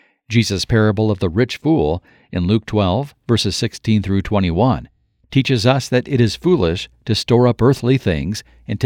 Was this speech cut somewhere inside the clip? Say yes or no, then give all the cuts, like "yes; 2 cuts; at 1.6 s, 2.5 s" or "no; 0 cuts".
no; 0 cuts